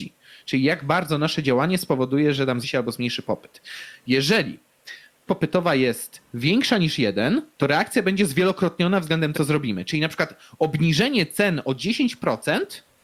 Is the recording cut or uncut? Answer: cut